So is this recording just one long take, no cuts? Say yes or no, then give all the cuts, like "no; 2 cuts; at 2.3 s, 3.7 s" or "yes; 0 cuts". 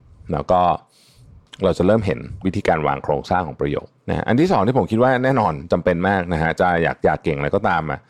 no; 1 cut; at 4.0 s